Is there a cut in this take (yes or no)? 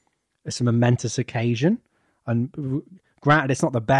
no